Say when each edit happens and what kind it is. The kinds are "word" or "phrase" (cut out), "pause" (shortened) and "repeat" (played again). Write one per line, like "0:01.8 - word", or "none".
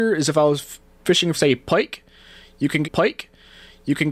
0:01.3 - word
0:02.8 - repeat